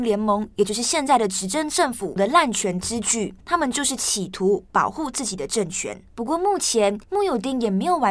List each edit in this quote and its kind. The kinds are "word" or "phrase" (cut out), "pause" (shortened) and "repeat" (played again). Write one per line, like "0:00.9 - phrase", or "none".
0:03.4 - pause
0:06.1 - pause
0:07.0 - pause